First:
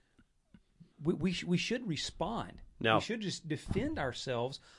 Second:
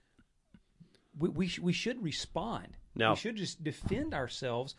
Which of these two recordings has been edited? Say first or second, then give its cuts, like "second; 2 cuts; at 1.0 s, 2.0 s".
first; 1 cut; at 0.9 s